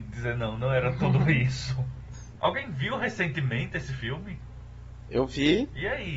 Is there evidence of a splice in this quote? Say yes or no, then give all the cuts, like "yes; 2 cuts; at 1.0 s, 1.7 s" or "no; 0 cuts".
no; 0 cuts